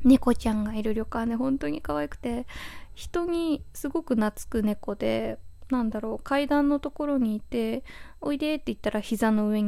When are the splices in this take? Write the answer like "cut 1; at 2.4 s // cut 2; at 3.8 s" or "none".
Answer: none